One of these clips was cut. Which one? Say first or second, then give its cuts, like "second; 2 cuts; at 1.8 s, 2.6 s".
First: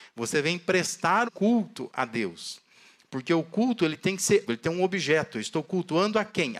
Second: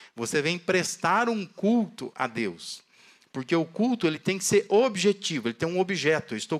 first; 2 cuts; at 1.2 s, 4.5 s